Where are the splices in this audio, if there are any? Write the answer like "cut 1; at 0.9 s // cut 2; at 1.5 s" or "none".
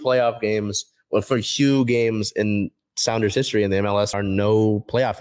cut 1; at 4.1 s